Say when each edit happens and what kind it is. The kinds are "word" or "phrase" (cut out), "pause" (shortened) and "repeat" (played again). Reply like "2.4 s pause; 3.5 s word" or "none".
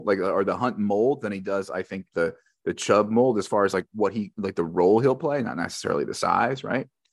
none